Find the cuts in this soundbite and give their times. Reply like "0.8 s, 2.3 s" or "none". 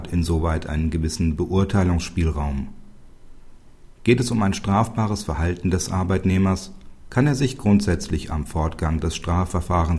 none